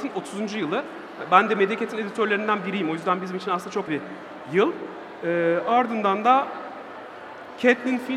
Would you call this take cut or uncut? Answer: cut